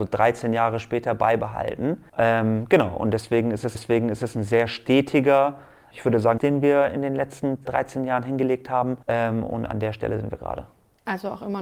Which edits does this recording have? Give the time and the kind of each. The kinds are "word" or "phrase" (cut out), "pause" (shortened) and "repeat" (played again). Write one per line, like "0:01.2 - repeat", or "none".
0:02.1 - pause
0:03.7 - repeat
0:05.9 - word
0:06.4 - phrase
0:07.6 - word
0:09.0 - pause